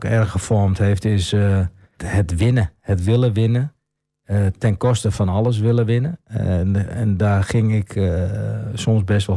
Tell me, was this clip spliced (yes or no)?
yes